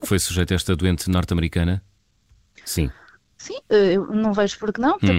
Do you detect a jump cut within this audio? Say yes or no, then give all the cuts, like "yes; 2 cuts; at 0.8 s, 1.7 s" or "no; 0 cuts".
no; 0 cuts